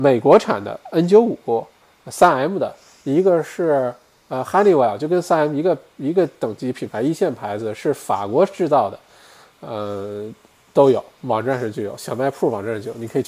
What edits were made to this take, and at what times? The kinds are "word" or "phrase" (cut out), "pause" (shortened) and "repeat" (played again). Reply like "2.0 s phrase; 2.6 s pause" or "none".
none